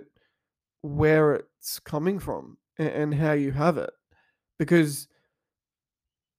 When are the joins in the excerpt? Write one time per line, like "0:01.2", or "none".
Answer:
none

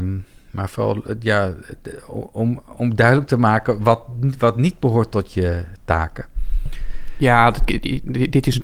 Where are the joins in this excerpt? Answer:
none

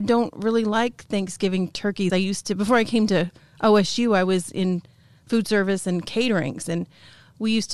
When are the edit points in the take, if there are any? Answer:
0:02.1

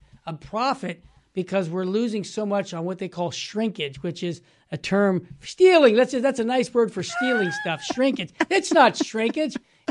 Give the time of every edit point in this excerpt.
none

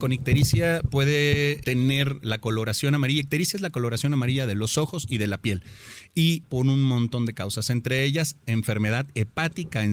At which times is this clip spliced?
0:01.6
0:06.4

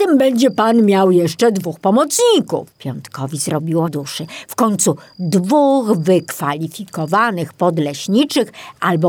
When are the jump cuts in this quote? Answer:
0:02.7
0:03.9

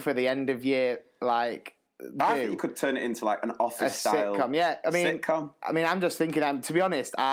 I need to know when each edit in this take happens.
none

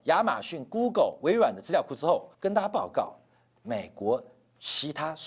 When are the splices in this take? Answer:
0:02.3

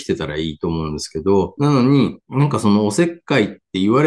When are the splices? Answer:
0:01.6
0:02.2

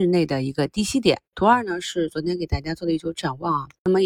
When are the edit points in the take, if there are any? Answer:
0:01.2

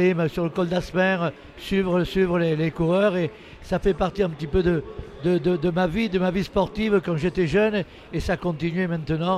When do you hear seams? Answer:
none

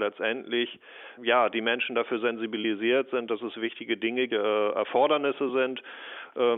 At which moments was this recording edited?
0:01.2
0:04.3

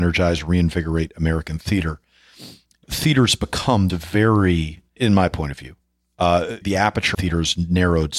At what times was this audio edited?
0:02.8
0:03.9
0:05.0
0:06.6
0:07.1

